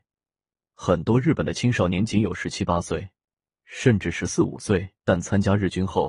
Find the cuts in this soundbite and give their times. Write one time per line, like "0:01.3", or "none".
0:05.0